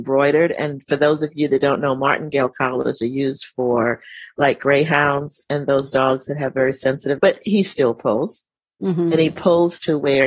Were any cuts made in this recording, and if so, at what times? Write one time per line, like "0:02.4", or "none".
0:07.2